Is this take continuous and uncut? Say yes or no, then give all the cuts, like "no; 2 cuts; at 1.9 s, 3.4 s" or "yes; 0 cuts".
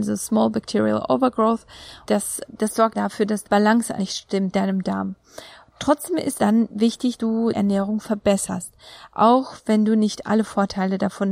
no; 9 cuts; at 2.1 s, 2.5 s, 2.9 s, 3.4 s, 4.0 s, 4.5 s, 6.3 s, 7.2 s, 7.5 s